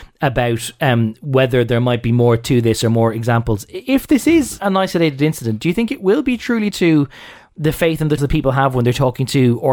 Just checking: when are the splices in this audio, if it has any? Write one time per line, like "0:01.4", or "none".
0:04.6
0:06.7
0:08.2